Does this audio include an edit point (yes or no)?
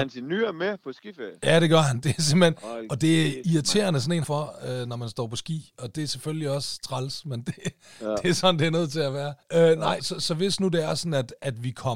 yes